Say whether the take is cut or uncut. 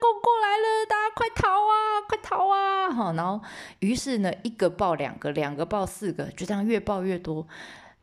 uncut